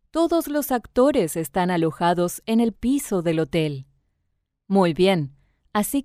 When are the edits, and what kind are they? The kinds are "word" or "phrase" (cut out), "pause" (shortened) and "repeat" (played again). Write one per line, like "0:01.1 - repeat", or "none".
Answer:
0:02.7 - word